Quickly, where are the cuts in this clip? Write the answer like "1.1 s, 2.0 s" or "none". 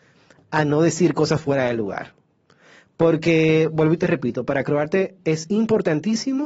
none